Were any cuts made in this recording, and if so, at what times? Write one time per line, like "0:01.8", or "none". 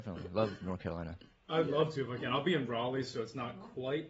none